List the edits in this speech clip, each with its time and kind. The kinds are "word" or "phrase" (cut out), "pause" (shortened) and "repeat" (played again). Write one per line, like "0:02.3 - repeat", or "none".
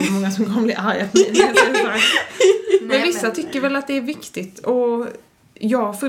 none